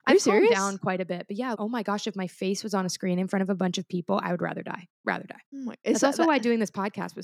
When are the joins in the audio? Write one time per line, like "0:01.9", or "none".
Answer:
0:01.5
0:05.5

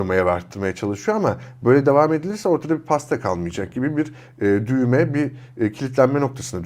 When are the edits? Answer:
none

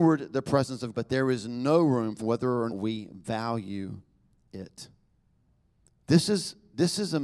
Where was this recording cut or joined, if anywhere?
0:00.9
0:02.2
0:02.7

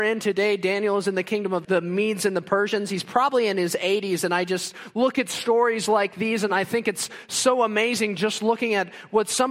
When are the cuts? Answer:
none

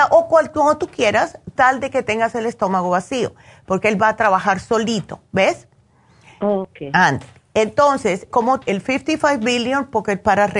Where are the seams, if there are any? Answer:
0:01.6
0:08.3
0:08.6

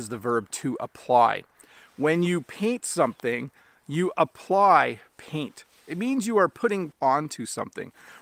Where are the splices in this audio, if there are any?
0:06.9

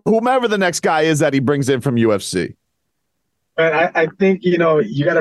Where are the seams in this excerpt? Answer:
none

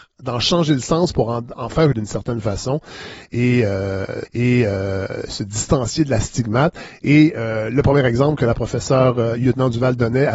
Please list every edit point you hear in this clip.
0:01.5
0:01.9
0:04.2

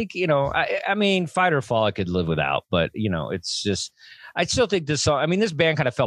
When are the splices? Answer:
none

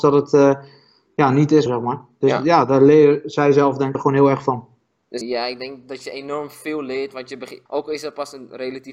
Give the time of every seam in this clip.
0:01.7
0:03.9
0:05.2
0:07.7

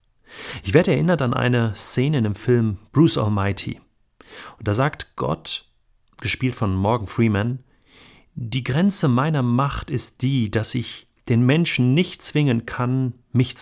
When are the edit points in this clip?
none

